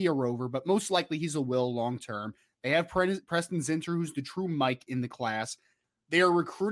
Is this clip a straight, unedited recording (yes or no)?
yes